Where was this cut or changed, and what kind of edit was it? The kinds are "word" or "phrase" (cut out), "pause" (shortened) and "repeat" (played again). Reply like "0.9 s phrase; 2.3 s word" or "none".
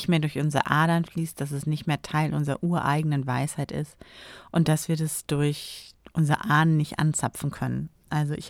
none